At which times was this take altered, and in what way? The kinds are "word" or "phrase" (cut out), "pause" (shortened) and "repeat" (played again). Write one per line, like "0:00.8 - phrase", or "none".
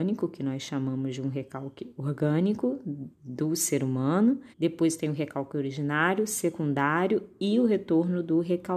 0:03.1 - pause
0:04.5 - pause